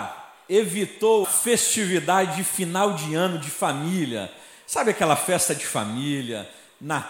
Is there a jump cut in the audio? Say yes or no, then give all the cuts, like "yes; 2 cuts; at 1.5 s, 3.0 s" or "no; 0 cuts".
yes; 1 cut; at 1.2 s